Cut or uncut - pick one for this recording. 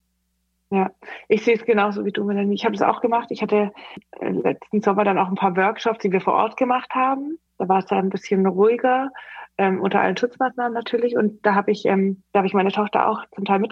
cut